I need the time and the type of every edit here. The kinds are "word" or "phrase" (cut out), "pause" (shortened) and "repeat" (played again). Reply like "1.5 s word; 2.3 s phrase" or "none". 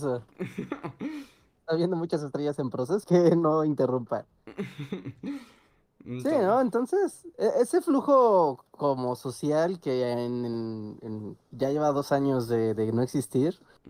3.0 s word